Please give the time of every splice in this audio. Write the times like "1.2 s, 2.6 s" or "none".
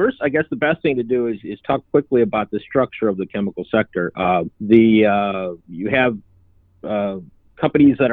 4.5 s, 5.6 s